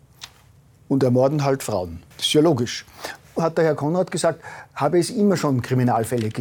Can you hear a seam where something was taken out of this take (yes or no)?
yes